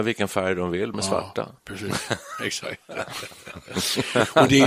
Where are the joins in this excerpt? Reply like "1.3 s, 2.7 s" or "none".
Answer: 0.9 s

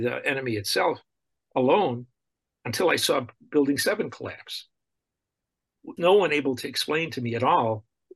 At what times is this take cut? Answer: 6.0 s

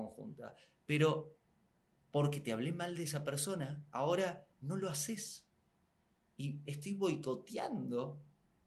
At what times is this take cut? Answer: 4.5 s

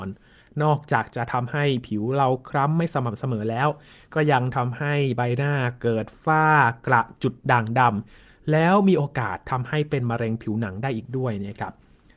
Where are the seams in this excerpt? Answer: none

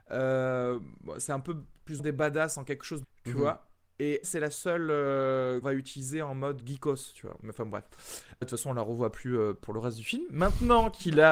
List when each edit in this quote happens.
2.0 s, 3.0 s, 4.2 s, 5.6 s, 6.6 s, 8.4 s

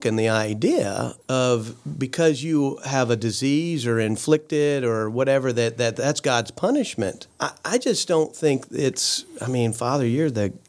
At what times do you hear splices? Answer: 7.3 s

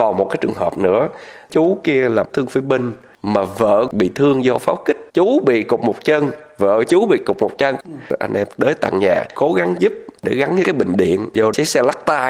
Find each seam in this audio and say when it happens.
5.1 s

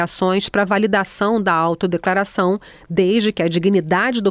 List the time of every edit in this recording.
none

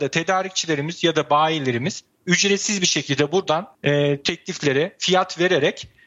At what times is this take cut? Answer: 3.7 s

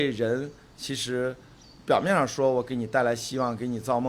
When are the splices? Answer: none

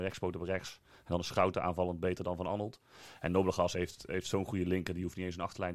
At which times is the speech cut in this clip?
3.7 s

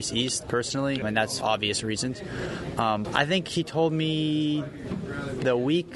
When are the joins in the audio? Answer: 1.0 s, 1.4 s, 3.0 s

